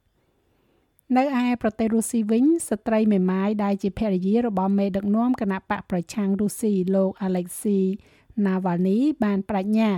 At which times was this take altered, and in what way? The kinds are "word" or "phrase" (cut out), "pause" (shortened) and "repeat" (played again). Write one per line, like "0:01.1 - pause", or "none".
none